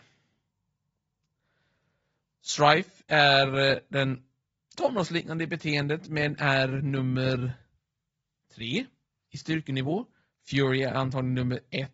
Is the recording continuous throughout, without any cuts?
yes; 0 cuts

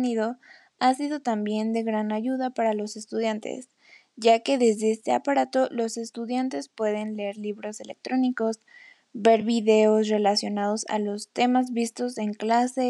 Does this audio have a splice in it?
no; 0 cuts

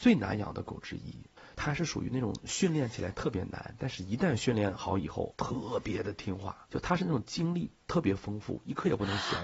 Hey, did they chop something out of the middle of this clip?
no; 0 cuts

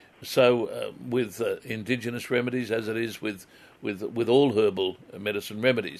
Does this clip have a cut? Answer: no; 0 cuts

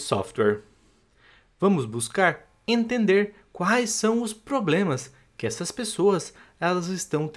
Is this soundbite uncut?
yes; 0 cuts

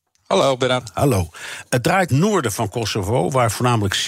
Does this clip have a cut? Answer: yes; 1 cut; at 2.1 s

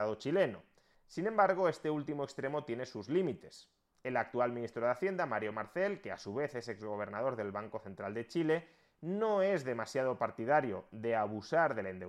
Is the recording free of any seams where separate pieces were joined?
yes; 0 cuts

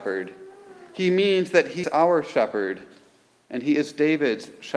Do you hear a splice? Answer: yes; 1 cut; at 1.8 s

